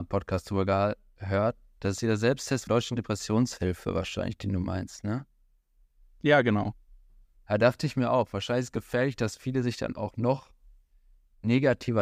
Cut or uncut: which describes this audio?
cut